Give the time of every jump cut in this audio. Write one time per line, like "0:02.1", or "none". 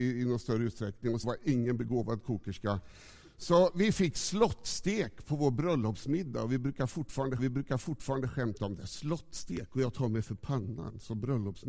0:01.2
0:07.4